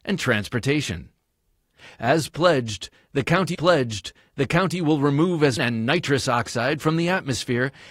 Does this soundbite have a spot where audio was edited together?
yes; 2 cuts; at 3.5 s, 5.6 s

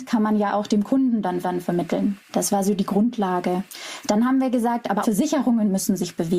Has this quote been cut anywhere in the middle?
yes; 2 cuts; at 1.4 s, 5.0 s

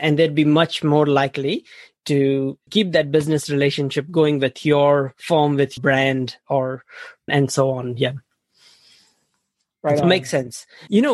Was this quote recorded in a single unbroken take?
no; 3 cuts; at 2.7 s, 5.8 s, 7.3 s

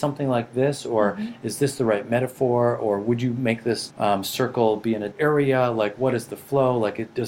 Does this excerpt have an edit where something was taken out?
yes; 2 cuts; at 3.9 s, 5.1 s

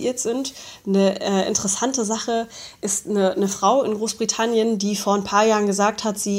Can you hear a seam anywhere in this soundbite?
no; 0 cuts

